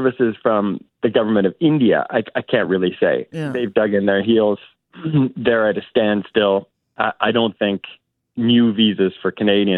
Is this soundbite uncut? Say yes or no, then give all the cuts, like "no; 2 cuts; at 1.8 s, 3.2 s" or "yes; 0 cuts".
yes; 0 cuts